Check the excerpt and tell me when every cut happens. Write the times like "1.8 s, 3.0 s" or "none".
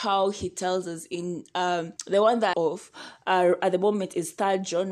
2.0 s, 2.5 s